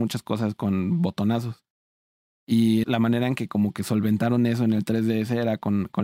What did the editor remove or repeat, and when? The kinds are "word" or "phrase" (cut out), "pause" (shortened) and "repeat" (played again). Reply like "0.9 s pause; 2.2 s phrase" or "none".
2.8 s word